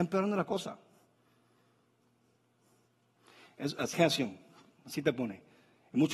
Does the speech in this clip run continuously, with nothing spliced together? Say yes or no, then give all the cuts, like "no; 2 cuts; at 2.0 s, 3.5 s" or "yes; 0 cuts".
no; 1 cut; at 3.9 s